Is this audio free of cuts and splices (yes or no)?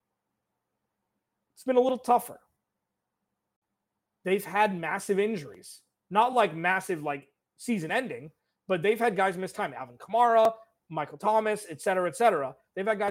yes